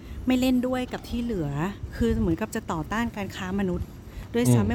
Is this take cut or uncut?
uncut